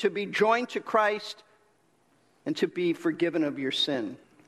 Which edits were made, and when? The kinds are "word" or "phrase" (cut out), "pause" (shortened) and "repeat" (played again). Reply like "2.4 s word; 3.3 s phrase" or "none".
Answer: none